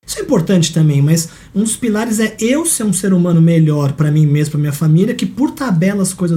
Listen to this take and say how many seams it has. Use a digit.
0